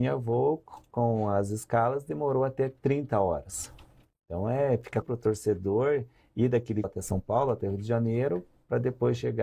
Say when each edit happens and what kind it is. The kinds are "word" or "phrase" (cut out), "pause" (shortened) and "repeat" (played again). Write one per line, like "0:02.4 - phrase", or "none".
0:05.0 - word
0:06.8 - phrase